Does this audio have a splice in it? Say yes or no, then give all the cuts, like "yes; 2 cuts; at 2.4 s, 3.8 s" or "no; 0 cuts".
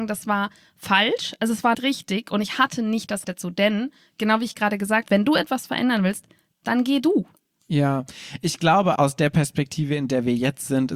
yes; 4 cuts; at 1.7 s, 3.2 s, 5.1 s, 9.0 s